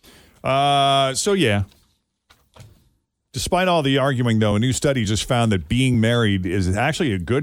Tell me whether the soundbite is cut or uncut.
uncut